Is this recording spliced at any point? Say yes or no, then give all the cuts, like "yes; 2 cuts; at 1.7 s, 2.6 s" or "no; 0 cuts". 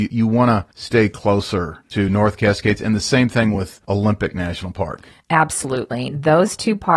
no; 0 cuts